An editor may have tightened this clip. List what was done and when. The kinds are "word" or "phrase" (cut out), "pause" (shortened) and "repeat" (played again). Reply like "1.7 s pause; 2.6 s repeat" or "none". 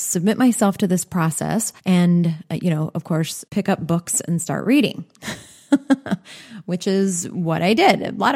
1.8 s pause; 3.5 s pause